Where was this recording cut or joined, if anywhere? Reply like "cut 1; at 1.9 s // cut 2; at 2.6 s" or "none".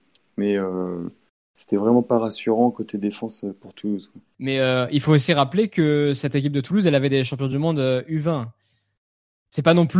none